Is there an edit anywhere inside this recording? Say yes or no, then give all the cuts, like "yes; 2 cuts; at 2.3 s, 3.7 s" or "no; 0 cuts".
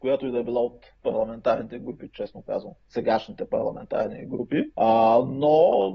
yes; 1 cut; at 4.7 s